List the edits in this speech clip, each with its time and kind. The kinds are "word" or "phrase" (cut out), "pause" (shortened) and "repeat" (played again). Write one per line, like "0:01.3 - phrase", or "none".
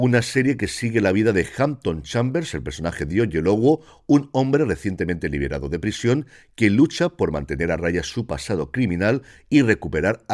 none